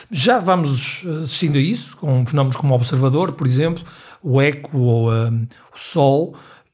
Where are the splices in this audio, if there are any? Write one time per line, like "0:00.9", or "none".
none